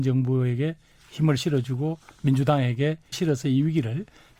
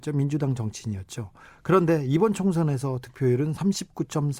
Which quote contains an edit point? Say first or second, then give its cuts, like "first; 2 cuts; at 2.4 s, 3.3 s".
first; 1 cut; at 3.1 s